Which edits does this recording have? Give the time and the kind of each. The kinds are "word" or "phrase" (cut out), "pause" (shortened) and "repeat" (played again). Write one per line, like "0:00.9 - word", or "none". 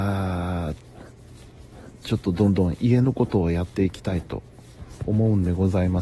0:05.0 - pause